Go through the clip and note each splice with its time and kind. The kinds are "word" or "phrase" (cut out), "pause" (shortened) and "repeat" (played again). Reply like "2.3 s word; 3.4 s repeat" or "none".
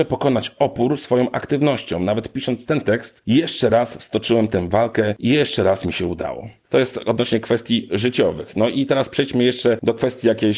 none